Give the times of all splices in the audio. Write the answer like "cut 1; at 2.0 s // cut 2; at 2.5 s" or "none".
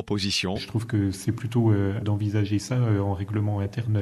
cut 1; at 2.0 s